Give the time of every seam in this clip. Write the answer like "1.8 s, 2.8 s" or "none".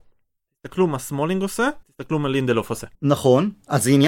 1.8 s, 2.9 s